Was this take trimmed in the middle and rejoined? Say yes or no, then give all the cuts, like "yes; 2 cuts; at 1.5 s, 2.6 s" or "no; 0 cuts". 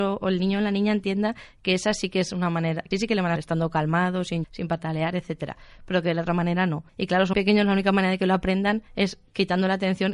yes; 6 cuts; at 2.9 s, 3.4 s, 4.4 s, 6.9 s, 7.3 s, 8.9 s